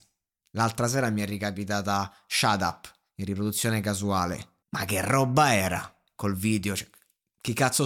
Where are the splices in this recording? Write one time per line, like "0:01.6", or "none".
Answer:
0:04.6